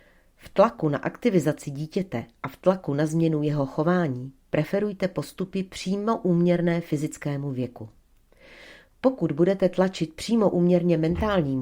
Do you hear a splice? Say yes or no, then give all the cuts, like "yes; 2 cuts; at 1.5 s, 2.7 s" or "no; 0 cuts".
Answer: no; 0 cuts